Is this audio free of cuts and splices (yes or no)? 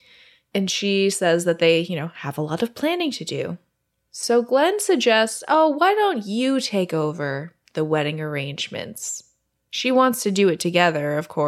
yes